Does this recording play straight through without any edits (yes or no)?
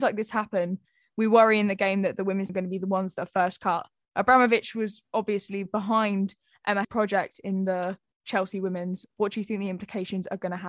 no